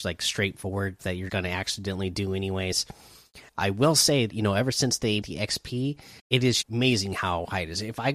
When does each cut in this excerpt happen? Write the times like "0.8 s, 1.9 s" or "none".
1.0 s, 1.3 s, 3.5 s, 4.3 s, 5.2 s, 6.2 s, 6.6 s